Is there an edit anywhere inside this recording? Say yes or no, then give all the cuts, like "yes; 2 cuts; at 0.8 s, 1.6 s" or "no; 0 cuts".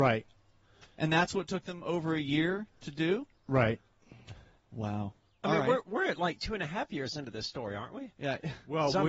no; 0 cuts